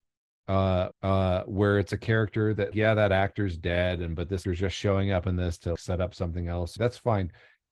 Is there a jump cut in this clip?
yes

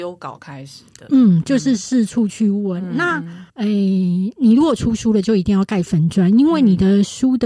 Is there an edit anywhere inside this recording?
yes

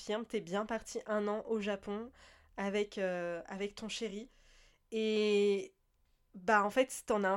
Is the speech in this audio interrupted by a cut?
no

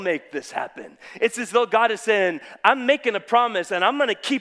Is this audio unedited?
yes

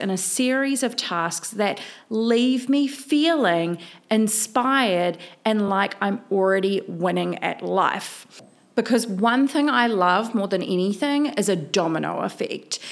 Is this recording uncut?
yes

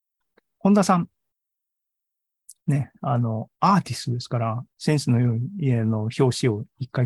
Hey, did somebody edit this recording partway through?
yes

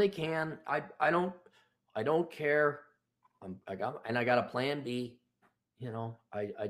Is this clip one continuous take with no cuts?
yes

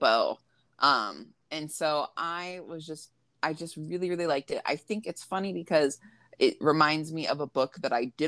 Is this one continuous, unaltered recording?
no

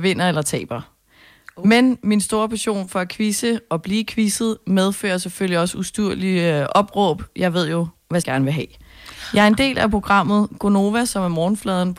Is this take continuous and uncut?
no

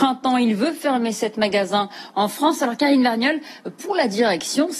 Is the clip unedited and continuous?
yes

